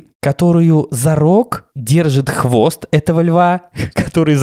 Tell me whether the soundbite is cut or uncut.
uncut